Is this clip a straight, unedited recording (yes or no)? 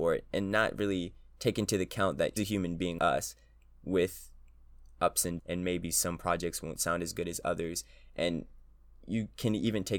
no